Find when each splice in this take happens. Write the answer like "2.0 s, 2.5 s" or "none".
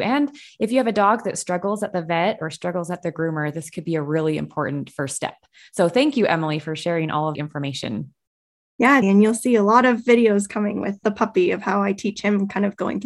7.3 s, 9.0 s, 11.0 s